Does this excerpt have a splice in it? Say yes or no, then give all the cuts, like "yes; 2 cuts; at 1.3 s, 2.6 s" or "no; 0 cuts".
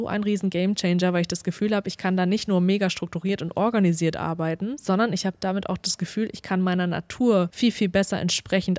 no; 0 cuts